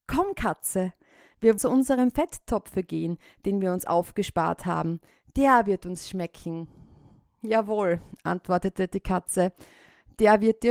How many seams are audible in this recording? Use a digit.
1